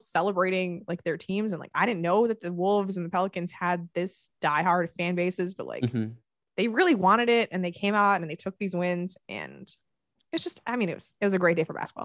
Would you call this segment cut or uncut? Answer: uncut